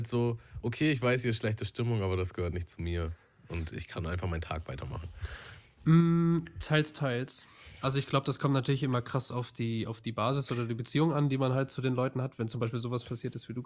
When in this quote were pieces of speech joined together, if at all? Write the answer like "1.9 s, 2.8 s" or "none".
none